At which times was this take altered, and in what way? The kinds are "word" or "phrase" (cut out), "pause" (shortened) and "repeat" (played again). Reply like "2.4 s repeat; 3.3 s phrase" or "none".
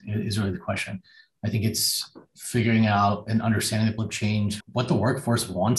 4.0 s word; 4.6 s word